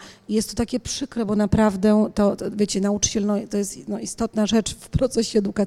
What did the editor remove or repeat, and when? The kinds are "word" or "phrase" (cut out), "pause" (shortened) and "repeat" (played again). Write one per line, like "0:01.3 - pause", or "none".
none